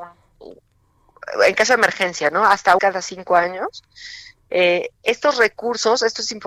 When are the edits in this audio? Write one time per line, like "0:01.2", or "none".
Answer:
0:02.8